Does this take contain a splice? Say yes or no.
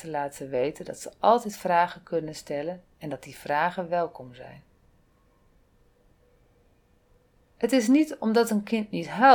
no